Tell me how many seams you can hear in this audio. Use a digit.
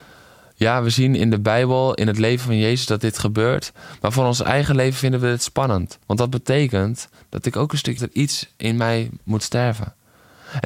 2